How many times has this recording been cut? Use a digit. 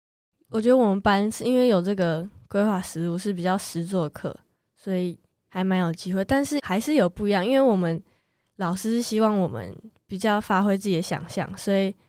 0